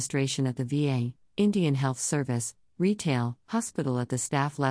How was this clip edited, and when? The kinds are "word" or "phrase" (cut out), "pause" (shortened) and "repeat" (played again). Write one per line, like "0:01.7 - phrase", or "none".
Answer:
0:03.4 - pause